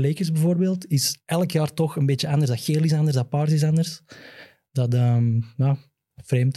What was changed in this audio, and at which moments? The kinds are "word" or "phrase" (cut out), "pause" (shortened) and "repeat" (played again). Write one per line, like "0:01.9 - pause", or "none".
none